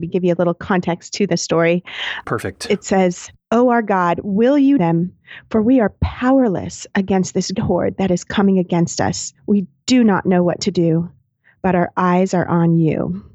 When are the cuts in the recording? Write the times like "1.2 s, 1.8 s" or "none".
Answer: 4.8 s, 7.5 s, 9.4 s